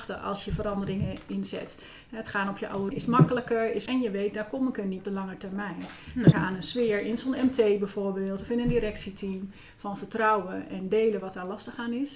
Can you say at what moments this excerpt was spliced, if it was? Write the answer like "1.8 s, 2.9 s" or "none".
2.9 s, 3.9 s, 5.0 s, 6.3 s